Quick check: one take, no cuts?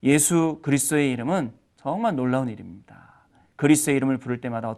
yes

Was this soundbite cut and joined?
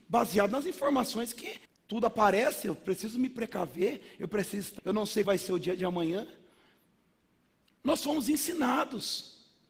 yes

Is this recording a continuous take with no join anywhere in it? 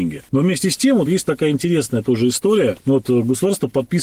yes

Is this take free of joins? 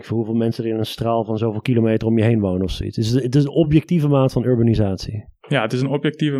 yes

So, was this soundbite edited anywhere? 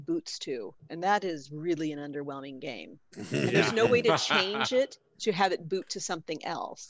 no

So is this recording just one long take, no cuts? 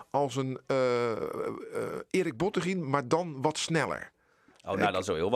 yes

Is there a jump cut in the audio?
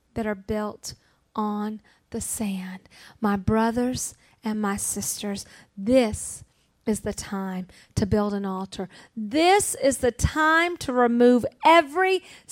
no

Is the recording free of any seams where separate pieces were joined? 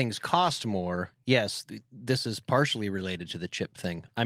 yes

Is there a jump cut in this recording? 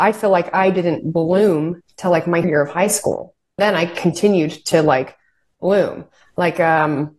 yes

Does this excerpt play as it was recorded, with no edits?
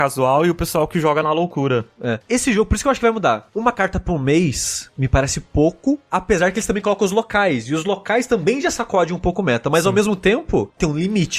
yes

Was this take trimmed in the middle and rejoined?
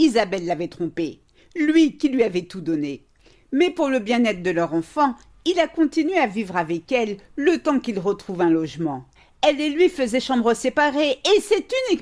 no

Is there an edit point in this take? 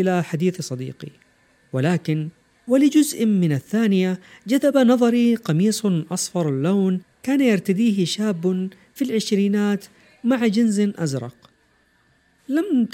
no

